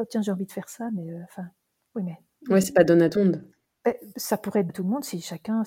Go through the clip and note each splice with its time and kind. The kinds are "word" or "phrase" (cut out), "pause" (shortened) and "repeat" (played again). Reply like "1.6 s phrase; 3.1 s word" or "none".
3.2 s word; 4.7 s word